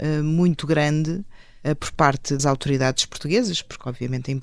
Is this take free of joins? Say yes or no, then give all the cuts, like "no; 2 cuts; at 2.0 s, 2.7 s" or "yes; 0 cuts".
no; 1 cut; at 2.4 s